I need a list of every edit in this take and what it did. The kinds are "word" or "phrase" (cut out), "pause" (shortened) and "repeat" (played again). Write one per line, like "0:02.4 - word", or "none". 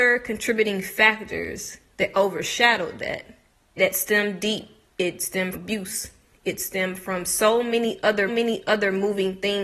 0:01.9 - pause
0:03.8 - word
0:05.5 - word
0:08.3 - repeat